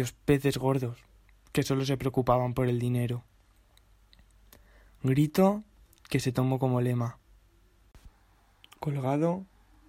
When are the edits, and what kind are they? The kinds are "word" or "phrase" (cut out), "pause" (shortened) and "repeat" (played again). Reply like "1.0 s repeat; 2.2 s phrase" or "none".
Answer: none

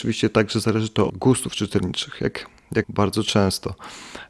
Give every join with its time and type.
1.1 s word; 2.8 s word

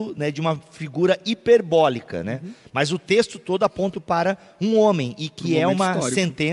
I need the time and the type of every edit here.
3.9 s word

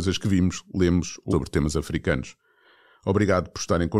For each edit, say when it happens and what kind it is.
1.3 s word

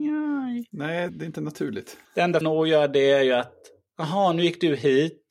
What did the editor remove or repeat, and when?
1.1 s word; 2.0 s pause; 2.4 s word

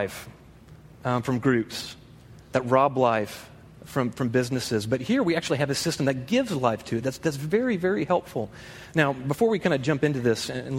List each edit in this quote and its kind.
none

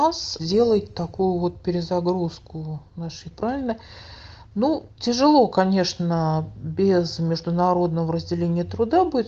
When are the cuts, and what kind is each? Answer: 3.3 s phrase

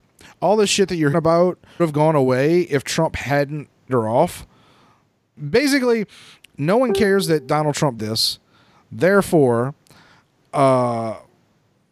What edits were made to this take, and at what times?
1.1 s word; 1.8 s word; 3.9 s word; 5.4 s word; 8.0 s word

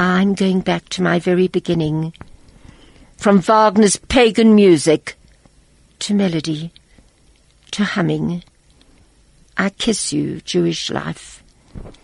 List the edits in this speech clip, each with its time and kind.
10.4 s word

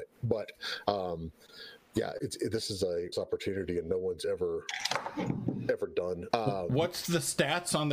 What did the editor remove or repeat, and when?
2.2 s word; 3.1 s word; 6.3 s word

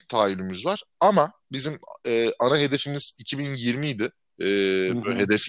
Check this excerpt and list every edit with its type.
1.4 s word

